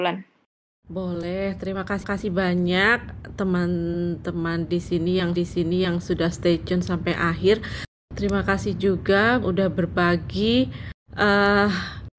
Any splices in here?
yes; 4 cuts; at 2.0 s, 5.4 s, 9.4 s, 11.0 s

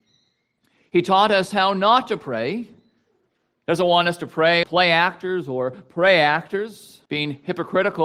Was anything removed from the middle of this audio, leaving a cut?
yes; 2 cuts; at 4.6 s, 7.1 s

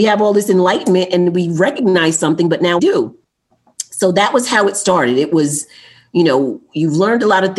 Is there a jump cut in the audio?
yes; 1 cut; at 2.8 s

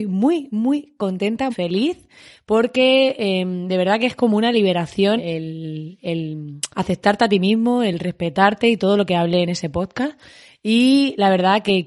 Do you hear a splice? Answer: yes; 3 cuts; at 1.5 s, 5.2 s, 6.7 s

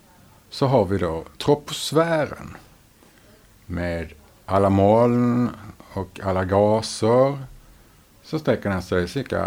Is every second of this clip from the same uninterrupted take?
no; 1 cut; at 1.3 s

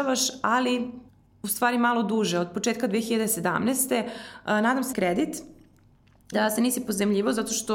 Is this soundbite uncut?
no; 3 cuts; at 1.1 s, 4.9 s, 6.3 s

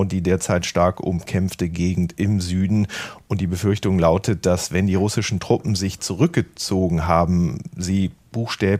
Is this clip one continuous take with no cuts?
yes; 0 cuts

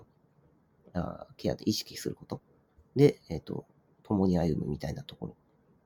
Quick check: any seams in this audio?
no; 0 cuts

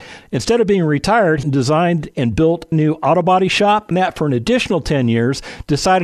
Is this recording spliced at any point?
yes; 3 cuts; at 1.4 s, 2.7 s, 3.9 s

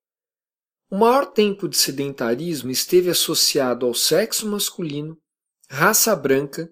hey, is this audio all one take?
yes; 0 cuts

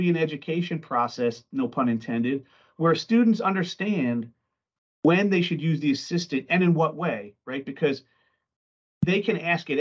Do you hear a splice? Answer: no; 0 cuts

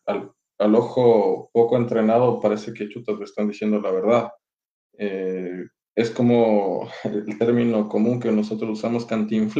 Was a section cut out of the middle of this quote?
no; 0 cuts

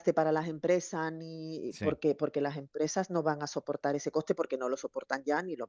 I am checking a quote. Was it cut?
no; 0 cuts

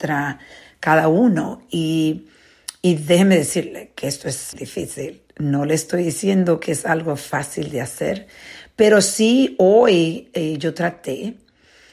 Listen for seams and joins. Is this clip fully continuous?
no; 1 cut; at 4.5 s

